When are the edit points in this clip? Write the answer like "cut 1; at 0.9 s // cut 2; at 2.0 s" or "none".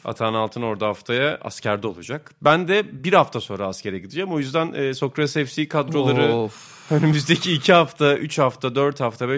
none